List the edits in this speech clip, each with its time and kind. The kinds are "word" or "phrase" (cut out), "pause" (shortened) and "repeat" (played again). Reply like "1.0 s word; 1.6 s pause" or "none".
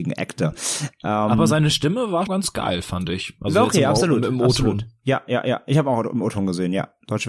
2.3 s word